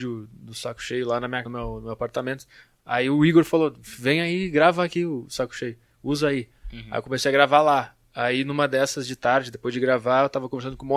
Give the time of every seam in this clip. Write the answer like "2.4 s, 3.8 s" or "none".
1.5 s, 8.0 s